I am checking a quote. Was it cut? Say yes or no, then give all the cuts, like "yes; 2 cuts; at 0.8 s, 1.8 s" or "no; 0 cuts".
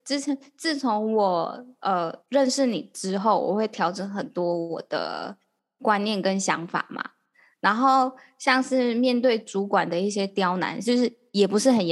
yes; 1 cut; at 2.2 s